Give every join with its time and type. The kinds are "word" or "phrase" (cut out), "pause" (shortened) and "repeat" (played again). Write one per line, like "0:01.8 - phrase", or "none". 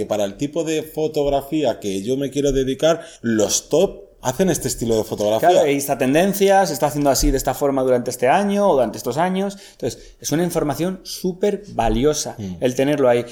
0:03.2 - pause